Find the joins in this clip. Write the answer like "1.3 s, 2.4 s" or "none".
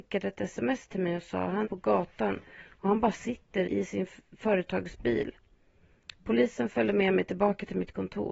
1.6 s, 3.6 s

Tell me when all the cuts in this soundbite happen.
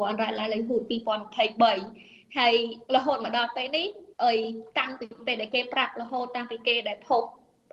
2.9 s, 4.1 s

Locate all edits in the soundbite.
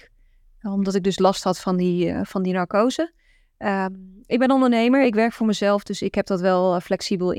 none

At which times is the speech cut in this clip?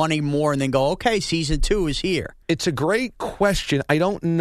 2.4 s

